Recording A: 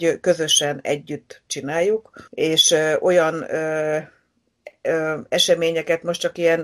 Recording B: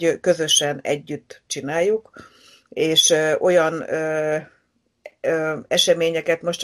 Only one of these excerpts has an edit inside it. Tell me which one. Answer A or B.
A